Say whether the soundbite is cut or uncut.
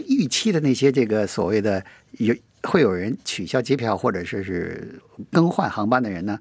uncut